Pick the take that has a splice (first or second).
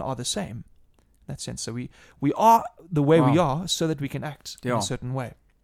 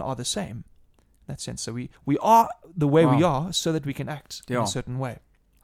second